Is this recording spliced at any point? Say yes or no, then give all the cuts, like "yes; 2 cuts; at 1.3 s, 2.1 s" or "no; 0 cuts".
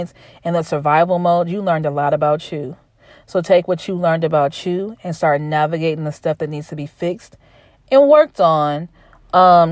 no; 0 cuts